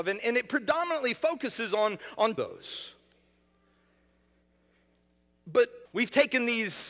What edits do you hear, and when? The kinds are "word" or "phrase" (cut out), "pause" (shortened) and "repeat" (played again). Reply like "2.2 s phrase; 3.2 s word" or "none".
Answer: 2.4 s phrase; 5.9 s word